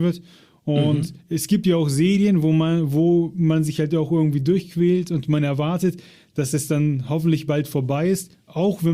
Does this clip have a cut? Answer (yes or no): no